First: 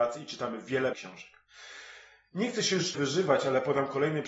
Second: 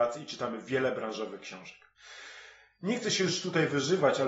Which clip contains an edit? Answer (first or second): first